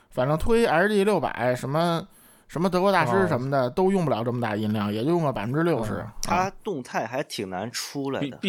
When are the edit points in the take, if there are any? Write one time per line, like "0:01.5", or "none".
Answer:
none